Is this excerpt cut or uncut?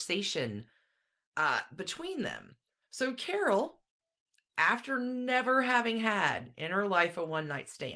cut